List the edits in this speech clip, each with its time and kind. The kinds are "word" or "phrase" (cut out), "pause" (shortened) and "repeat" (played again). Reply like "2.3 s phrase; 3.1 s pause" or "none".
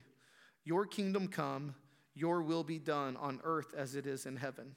none